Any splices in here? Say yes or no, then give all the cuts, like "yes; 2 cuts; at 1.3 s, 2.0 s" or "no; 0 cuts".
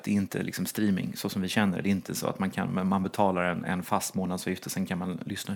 no; 0 cuts